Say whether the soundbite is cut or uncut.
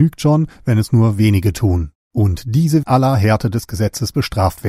cut